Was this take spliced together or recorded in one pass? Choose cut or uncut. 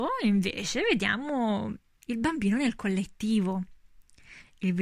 uncut